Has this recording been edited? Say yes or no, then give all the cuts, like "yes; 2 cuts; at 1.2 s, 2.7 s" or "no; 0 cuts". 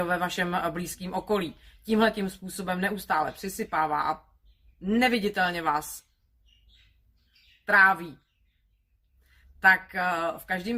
no; 0 cuts